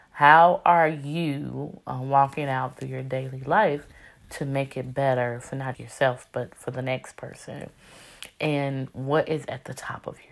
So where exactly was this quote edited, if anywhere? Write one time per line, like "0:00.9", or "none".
0:05.7